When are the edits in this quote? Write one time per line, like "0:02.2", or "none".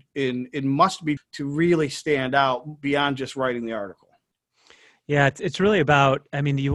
0:01.2